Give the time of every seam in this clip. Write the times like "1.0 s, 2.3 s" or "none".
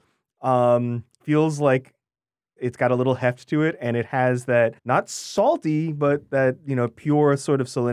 1.2 s, 2.6 s, 4.8 s